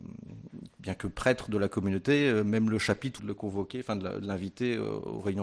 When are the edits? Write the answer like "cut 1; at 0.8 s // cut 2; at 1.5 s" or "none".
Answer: cut 1; at 3.2 s